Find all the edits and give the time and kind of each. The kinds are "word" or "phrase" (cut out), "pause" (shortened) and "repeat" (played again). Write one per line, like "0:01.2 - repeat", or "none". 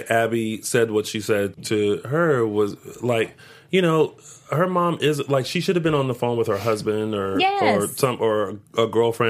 0:01.5 - word